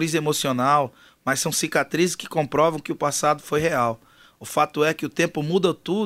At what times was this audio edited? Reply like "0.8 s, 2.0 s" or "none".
none